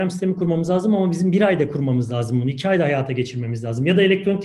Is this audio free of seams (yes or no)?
yes